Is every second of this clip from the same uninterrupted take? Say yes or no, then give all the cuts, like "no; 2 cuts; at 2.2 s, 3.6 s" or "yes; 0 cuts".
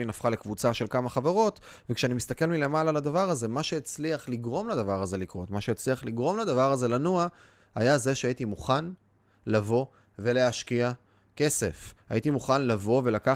yes; 0 cuts